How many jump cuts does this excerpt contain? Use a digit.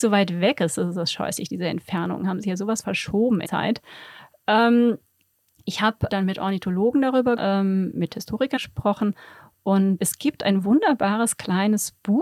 6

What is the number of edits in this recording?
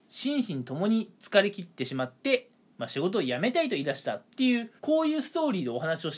2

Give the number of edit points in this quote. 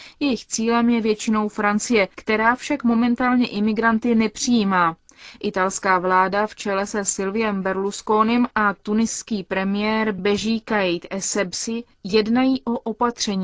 0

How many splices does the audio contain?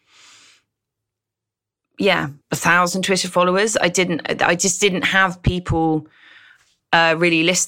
1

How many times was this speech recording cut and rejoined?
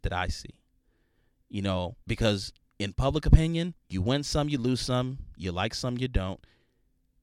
2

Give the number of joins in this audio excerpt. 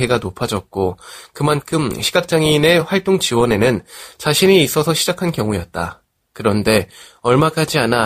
0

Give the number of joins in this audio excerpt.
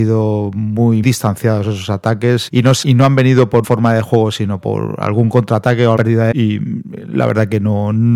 7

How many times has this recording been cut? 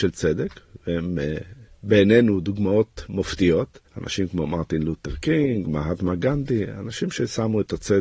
1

